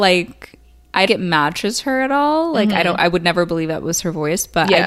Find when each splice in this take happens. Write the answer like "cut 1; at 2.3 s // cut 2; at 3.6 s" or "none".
cut 1; at 1.1 s